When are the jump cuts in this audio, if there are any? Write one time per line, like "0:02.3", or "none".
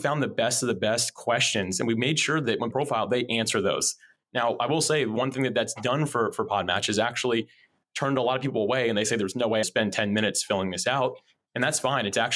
0:02.7
0:09.6

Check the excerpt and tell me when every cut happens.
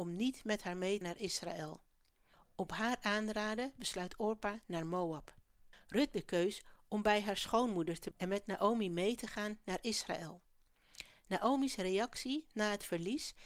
0:01.0
0:04.6
0:06.1
0:08.1

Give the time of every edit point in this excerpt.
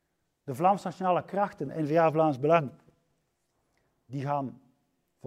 none

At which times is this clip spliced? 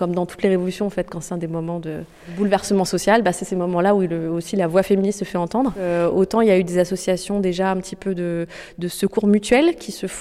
none

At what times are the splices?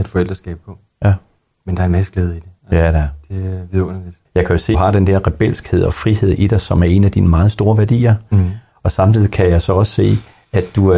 0:04.3
0:04.7

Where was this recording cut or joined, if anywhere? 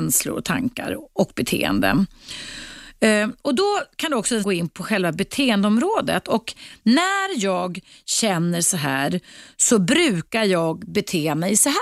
0:04.4

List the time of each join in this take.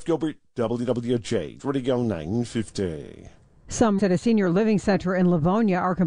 0:01.6
0:04.0

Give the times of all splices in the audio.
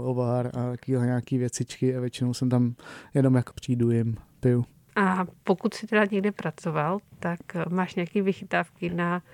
0:03.5

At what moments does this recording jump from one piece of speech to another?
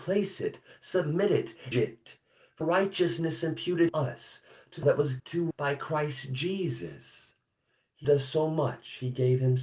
0:01.7
0:02.6
0:03.9
0:04.8
0:05.2
0:05.5
0:08.0

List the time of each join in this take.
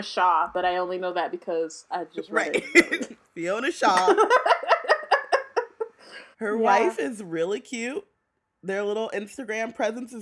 0:06.3
0:08.3

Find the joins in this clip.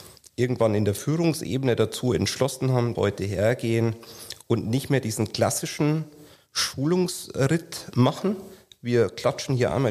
0:02.9

